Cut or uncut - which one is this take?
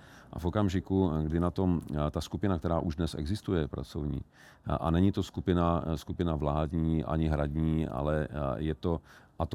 uncut